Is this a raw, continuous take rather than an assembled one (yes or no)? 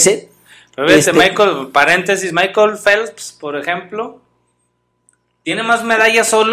yes